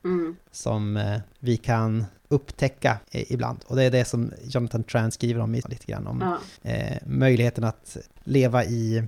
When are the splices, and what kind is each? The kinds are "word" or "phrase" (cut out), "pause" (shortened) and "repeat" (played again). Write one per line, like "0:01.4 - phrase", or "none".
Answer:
0:03.0 - pause
0:05.6 - phrase
0:06.6 - pause